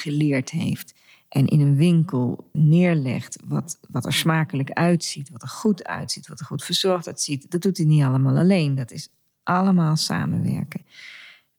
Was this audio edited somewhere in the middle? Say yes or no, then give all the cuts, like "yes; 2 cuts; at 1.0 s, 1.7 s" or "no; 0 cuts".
yes; 1 cut; at 2.5 s